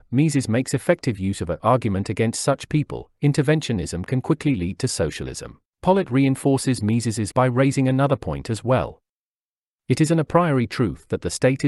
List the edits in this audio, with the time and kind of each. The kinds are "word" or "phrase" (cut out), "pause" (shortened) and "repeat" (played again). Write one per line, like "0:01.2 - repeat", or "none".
0:01.6 - phrase
0:05.7 - pause
0:07.3 - word